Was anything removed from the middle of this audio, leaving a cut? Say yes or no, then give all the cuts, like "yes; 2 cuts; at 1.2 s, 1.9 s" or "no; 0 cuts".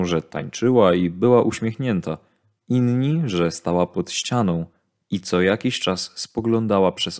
no; 0 cuts